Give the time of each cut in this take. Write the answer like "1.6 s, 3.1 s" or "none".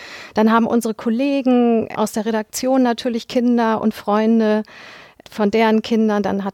none

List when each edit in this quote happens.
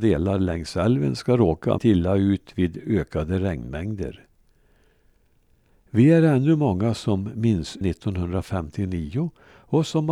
1.8 s, 7.8 s

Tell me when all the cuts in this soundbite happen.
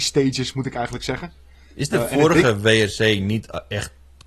none

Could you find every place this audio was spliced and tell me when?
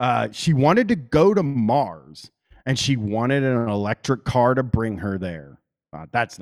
none

